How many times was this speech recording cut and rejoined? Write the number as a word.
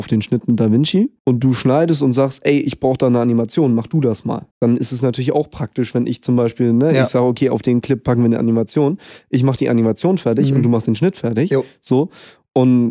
two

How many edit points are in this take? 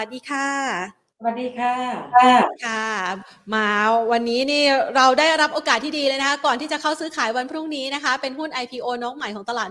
one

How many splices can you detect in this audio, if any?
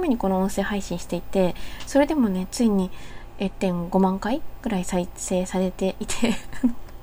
one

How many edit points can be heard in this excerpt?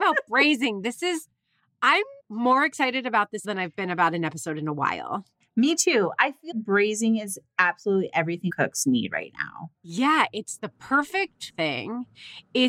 six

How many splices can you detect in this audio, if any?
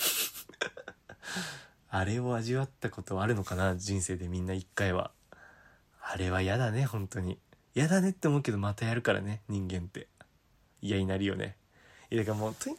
zero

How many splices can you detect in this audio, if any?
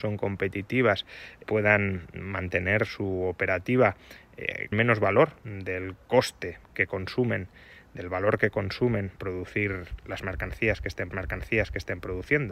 six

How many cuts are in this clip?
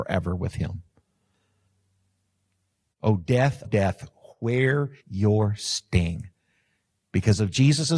two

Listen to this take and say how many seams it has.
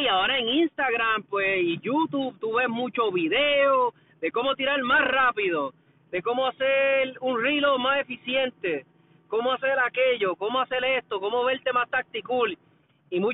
zero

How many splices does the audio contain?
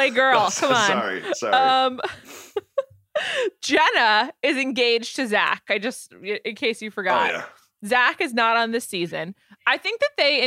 zero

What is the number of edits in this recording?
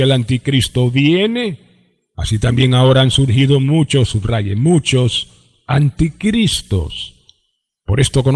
zero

